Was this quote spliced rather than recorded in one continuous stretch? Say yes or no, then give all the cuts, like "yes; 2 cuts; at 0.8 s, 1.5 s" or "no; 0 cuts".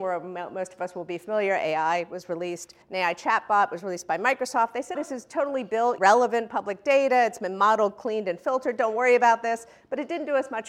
yes; 3 cuts; at 2.8 s, 4.9 s, 6.0 s